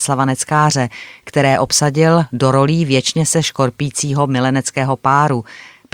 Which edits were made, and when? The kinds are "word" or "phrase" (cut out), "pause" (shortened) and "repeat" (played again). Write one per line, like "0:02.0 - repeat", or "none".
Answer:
none